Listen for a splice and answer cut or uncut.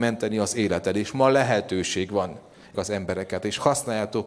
cut